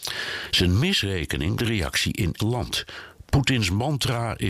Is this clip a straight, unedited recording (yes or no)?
no